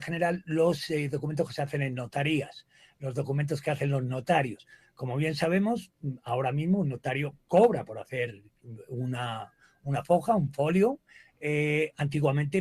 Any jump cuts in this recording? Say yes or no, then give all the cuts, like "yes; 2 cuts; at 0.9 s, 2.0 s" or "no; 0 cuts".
no; 0 cuts